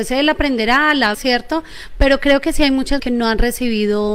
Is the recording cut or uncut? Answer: cut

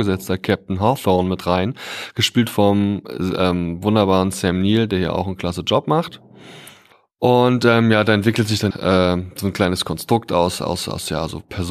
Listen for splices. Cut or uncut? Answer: cut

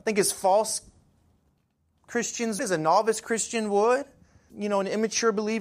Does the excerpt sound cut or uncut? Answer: cut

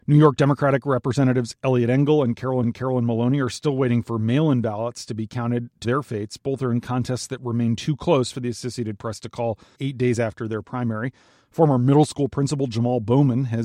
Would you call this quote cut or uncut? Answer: cut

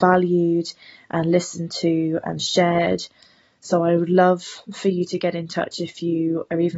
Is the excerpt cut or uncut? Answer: uncut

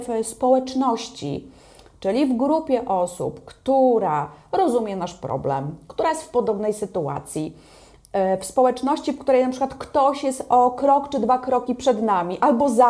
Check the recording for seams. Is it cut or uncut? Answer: uncut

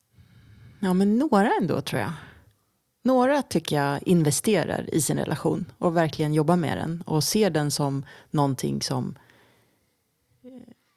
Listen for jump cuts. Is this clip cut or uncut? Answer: uncut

